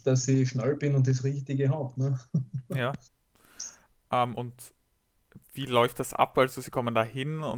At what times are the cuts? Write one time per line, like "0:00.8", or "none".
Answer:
0:03.1
0:05.4